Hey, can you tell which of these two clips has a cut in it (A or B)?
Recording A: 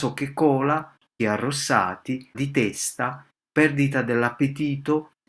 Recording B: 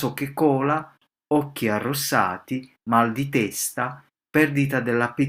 A